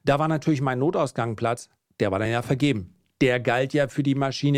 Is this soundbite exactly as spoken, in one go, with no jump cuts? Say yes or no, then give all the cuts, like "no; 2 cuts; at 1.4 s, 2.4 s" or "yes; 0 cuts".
yes; 0 cuts